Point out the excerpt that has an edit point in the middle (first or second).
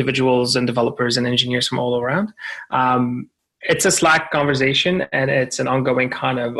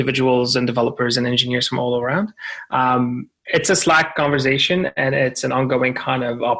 second